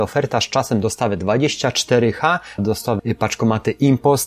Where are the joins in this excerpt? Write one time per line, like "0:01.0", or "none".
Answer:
0:02.6
0:03.0